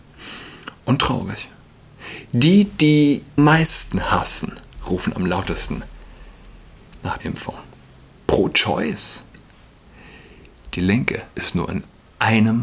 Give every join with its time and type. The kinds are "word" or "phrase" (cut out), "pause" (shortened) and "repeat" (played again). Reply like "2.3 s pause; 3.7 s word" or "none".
3.4 s phrase; 7.2 s word; 11.3 s pause